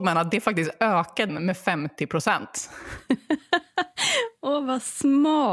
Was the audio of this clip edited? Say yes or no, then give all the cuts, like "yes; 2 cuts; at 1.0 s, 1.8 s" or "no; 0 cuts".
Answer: yes; 1 cut; at 1.3 s